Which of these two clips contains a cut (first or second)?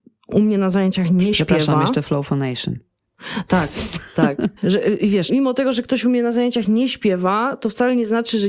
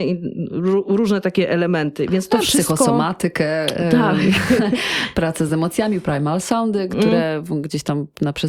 first